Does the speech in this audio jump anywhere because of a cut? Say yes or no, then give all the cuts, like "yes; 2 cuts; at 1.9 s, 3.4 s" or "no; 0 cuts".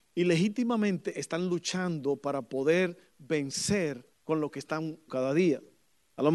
yes; 2 cuts; at 4.1 s, 5.1 s